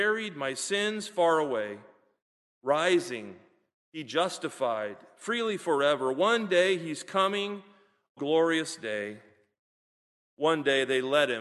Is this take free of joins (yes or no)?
no